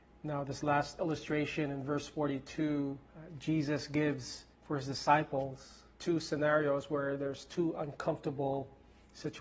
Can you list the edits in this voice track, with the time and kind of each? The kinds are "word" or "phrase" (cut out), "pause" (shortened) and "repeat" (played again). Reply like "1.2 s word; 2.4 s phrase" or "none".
3.1 s pause; 4.5 s pause; 5.9 s pause